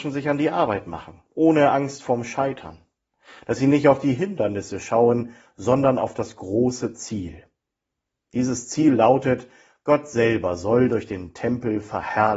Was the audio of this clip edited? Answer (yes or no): no